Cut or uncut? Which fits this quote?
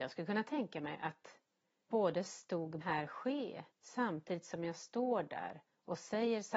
cut